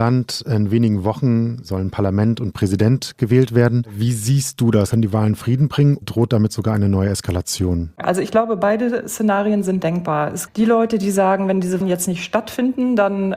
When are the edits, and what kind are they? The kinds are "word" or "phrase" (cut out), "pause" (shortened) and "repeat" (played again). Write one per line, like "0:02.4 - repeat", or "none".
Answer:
0:06.0 - word
0:10.5 - word
0:11.8 - word